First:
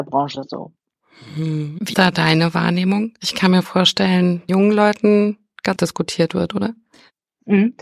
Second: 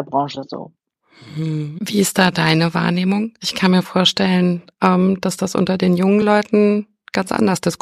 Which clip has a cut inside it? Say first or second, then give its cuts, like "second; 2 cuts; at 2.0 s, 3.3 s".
first; 3 cuts; at 1.9 s, 4.5 s, 5.8 s